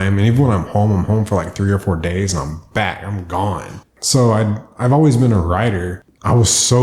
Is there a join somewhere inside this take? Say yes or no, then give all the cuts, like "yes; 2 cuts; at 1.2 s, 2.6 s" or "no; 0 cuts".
no; 0 cuts